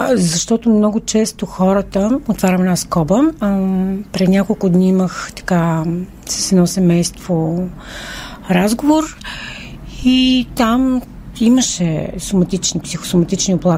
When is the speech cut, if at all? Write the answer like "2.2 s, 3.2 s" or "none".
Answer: none